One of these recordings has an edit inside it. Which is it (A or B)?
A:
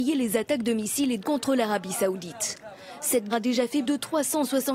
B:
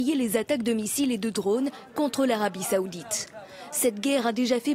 A